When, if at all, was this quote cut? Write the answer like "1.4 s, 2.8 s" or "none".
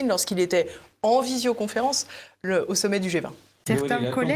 none